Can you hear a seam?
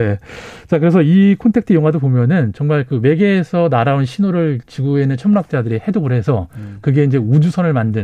no; 0 cuts

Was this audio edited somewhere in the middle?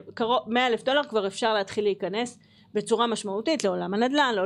no; 0 cuts

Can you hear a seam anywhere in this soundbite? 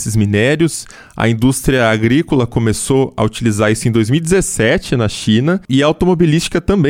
no; 0 cuts

